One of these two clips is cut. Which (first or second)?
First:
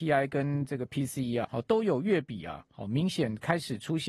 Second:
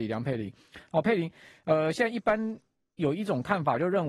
first